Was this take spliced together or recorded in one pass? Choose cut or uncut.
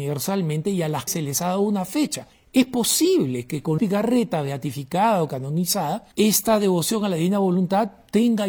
cut